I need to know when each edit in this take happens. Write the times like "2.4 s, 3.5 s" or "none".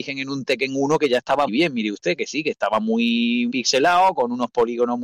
1.5 s, 3.5 s